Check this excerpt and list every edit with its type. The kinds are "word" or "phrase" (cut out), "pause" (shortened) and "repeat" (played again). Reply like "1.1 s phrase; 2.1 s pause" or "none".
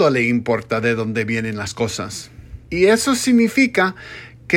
2.6 s pause